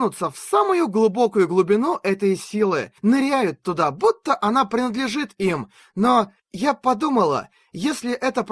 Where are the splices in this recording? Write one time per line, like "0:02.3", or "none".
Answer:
0:03.0
0:06.4